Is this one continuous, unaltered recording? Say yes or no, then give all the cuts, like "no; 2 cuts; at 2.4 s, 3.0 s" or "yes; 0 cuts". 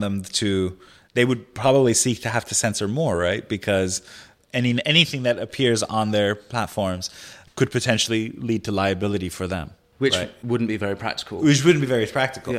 yes; 0 cuts